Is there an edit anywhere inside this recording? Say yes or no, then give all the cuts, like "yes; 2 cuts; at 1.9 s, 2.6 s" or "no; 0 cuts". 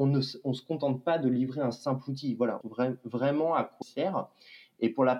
yes; 2 cuts; at 2.6 s, 3.8 s